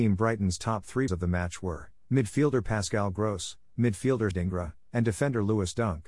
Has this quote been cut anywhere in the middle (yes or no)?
yes